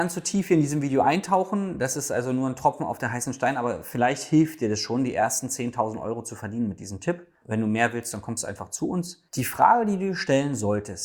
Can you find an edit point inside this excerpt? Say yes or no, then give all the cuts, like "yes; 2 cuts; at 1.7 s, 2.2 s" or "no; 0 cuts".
yes; 2 cuts; at 7.4 s, 9.3 s